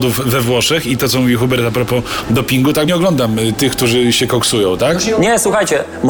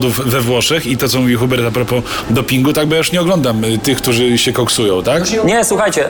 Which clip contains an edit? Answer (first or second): first